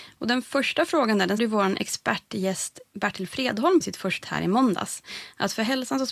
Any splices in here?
yes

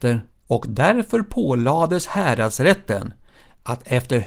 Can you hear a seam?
no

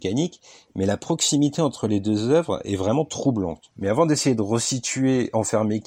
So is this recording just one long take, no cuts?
yes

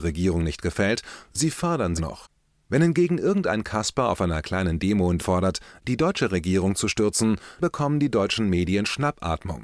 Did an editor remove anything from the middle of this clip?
yes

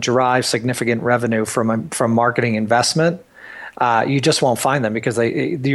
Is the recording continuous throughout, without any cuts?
yes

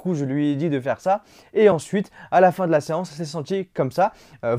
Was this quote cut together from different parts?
no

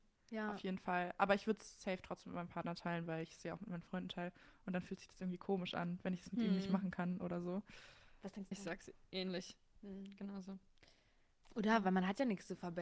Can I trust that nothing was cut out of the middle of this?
no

